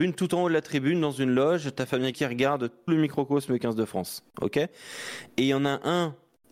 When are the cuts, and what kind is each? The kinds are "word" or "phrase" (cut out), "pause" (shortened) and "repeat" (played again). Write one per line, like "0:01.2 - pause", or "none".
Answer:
0:02.1 - word
0:02.9 - word